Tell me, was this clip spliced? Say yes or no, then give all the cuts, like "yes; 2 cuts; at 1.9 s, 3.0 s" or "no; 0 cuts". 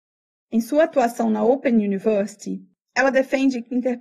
no; 0 cuts